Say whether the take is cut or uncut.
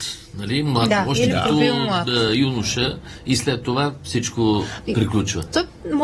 uncut